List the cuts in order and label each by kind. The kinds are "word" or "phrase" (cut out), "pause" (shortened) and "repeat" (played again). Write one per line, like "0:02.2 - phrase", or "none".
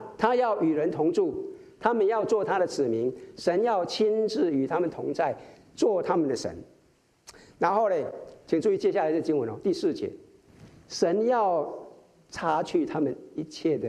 none